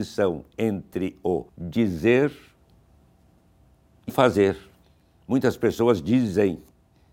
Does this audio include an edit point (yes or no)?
yes